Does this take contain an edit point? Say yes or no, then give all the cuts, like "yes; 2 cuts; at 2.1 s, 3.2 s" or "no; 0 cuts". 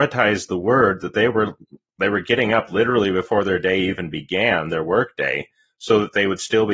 no; 0 cuts